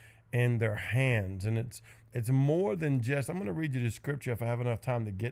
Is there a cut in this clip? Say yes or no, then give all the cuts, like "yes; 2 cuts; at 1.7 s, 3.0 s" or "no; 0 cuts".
no; 0 cuts